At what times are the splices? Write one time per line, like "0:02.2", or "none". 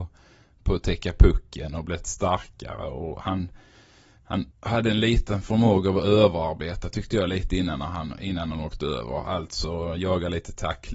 0:04.5